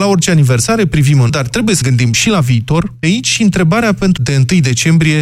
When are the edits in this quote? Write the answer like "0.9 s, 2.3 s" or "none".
1.3 s, 1.8 s, 3.0 s, 4.2 s